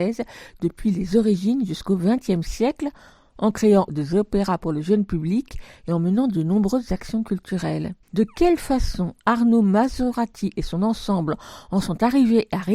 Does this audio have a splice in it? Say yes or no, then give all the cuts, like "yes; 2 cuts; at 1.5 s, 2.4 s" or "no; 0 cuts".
yes; 2 cuts; at 3.9 s, 8.0 s